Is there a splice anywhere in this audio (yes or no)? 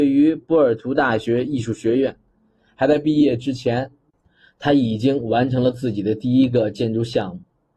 no